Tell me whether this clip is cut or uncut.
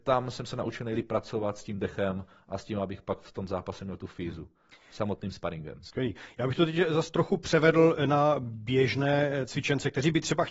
uncut